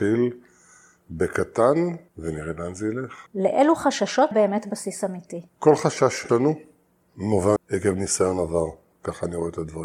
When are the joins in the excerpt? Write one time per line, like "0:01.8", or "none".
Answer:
0:02.1
0:03.3
0:04.3
0:05.5
0:06.3
0:07.6